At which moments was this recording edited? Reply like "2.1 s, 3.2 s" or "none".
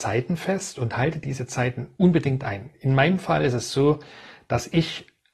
none